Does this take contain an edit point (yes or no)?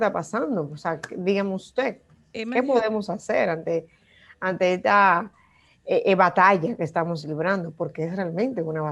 no